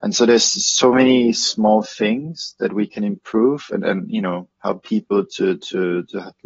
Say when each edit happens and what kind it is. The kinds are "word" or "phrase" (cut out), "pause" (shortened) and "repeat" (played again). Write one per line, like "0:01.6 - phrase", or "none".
none